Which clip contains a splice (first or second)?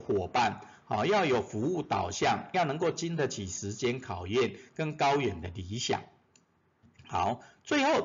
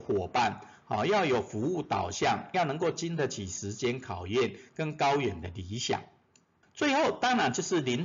second